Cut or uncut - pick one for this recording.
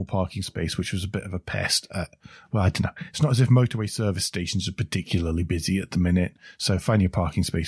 uncut